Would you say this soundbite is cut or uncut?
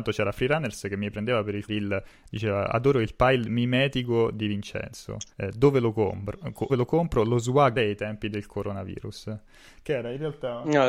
cut